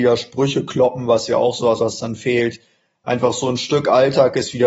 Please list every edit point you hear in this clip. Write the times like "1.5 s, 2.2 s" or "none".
1.8 s